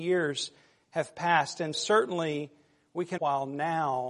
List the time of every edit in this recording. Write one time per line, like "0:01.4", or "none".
0:01.7
0:03.2